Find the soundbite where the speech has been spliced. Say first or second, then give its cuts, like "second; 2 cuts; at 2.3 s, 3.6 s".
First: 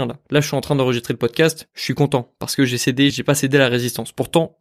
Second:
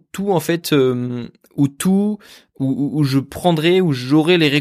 first; 1 cut; at 3.1 s